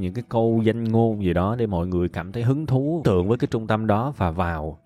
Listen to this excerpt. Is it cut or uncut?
cut